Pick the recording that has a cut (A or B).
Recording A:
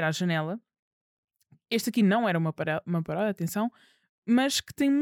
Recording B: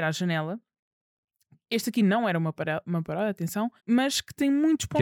B